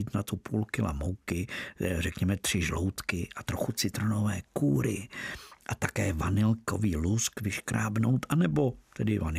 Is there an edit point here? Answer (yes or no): no